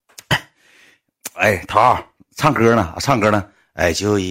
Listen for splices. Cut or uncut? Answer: uncut